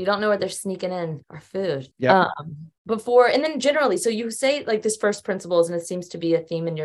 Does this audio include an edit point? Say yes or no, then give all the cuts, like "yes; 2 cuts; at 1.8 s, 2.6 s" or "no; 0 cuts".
yes; 3 cuts; at 1.2 s, 1.9 s, 2.8 s